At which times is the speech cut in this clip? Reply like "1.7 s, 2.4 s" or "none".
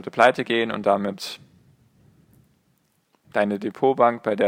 3.2 s